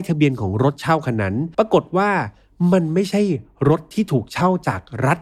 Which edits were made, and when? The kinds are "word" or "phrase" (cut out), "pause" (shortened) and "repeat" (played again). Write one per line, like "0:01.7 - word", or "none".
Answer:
0:01.5 - pause